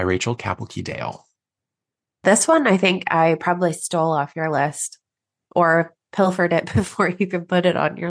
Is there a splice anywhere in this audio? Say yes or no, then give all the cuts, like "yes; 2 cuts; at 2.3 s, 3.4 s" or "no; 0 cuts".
no; 0 cuts